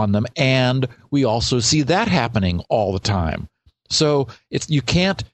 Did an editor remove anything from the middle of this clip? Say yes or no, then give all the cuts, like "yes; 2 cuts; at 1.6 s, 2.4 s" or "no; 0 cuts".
no; 0 cuts